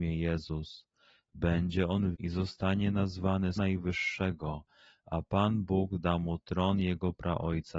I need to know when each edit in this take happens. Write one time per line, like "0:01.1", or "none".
0:02.1
0:03.6